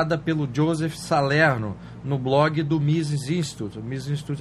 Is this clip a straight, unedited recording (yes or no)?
yes